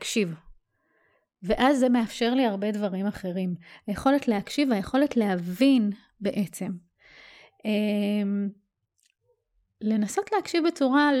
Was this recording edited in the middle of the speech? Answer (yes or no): no